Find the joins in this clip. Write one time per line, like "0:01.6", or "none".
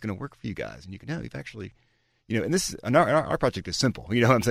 0:01.0